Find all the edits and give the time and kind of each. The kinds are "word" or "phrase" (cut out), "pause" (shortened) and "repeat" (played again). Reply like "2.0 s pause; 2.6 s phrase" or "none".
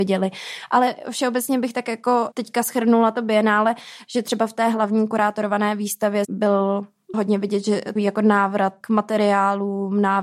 2.3 s word; 6.2 s word; 7.1 s word; 8.0 s word; 8.8 s word